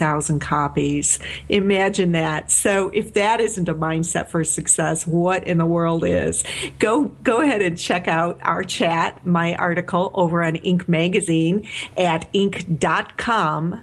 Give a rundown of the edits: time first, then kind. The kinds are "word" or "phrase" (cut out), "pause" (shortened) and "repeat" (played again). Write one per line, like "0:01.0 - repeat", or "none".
none